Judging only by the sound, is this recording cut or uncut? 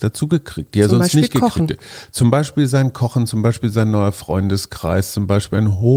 uncut